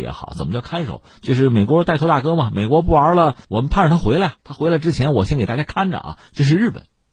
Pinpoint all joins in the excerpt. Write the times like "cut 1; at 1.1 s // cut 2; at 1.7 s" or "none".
cut 1; at 3.4 s